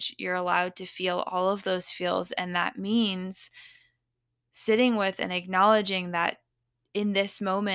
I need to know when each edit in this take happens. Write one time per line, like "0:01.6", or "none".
none